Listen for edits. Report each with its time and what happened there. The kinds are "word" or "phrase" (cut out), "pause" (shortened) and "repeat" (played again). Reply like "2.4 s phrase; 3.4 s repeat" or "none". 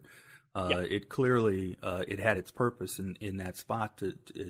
none